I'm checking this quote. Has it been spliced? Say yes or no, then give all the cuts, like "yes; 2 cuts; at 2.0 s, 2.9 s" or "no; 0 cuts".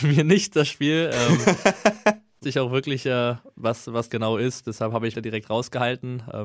yes; 4 cuts; at 2.4 s, 3.0 s, 4.1 s, 5.1 s